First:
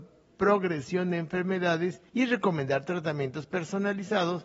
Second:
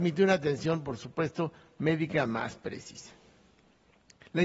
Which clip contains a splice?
first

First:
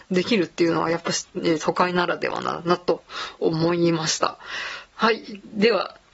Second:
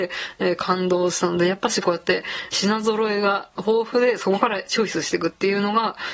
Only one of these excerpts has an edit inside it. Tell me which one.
second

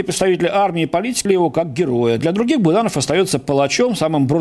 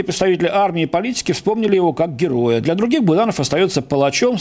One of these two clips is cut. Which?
first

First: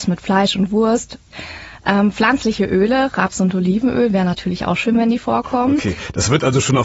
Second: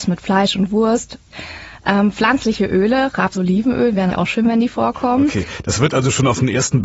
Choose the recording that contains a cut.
second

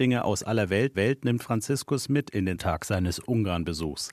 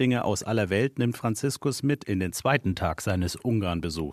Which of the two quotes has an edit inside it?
first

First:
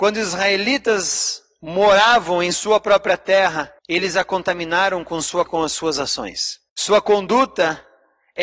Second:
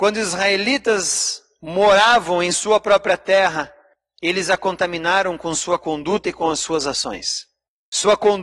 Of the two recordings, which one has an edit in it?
first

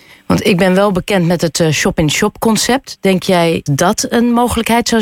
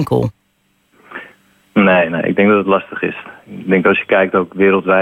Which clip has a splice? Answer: first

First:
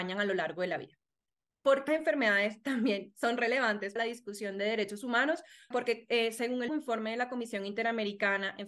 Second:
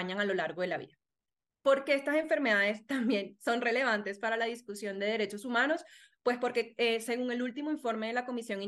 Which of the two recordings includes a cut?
first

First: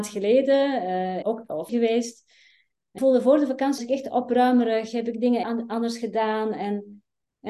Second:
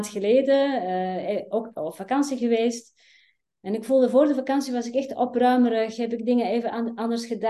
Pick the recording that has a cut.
first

